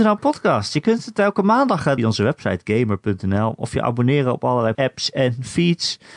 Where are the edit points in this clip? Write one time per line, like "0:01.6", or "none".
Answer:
0:02.0
0:04.7